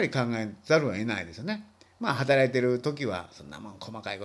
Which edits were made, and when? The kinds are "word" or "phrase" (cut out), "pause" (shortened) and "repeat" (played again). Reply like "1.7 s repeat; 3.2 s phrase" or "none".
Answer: none